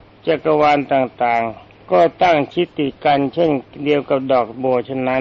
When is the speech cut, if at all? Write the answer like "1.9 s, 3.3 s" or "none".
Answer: 1.9 s